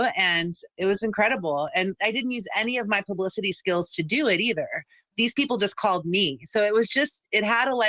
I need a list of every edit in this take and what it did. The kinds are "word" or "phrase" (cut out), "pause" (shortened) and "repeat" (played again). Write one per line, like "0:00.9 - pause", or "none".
none